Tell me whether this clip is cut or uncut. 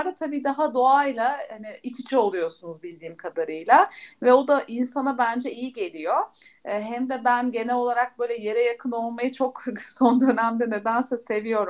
uncut